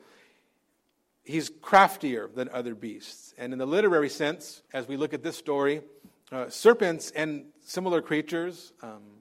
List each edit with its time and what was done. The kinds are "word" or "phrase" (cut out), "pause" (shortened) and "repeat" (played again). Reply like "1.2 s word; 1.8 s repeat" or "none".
4.7 s pause